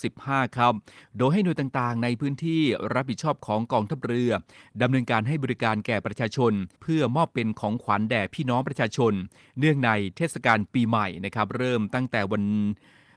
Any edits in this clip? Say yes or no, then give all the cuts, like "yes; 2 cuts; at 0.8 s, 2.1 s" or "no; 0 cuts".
yes; 1 cut; at 6.7 s